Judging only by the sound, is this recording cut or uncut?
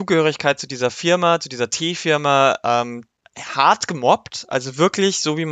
uncut